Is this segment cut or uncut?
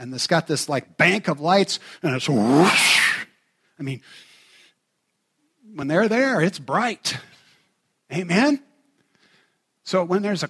uncut